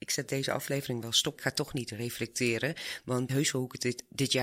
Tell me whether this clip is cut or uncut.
cut